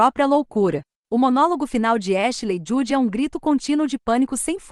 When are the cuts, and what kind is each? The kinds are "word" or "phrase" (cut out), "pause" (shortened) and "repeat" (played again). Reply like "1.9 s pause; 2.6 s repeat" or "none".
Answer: none